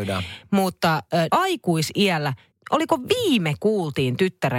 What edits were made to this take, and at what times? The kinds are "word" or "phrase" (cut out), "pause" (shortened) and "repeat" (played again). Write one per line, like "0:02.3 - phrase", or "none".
0:01.3 - word
0:02.5 - pause
0:03.6 - word